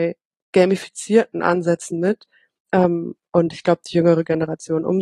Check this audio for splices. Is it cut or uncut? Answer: uncut